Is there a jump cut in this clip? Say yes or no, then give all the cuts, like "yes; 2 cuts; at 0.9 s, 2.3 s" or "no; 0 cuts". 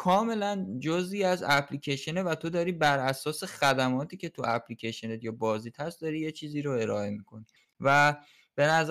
yes; 1 cut; at 7.6 s